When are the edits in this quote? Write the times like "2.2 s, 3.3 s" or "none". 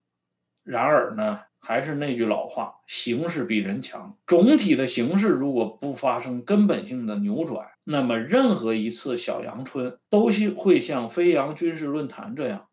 1.5 s, 4.2 s, 7.7 s, 10.1 s